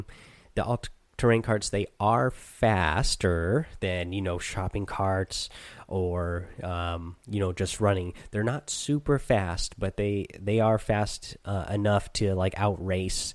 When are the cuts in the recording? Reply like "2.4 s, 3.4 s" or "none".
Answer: 7.2 s